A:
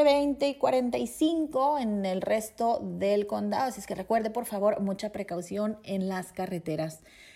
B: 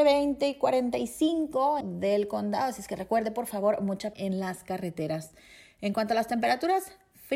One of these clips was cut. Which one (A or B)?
B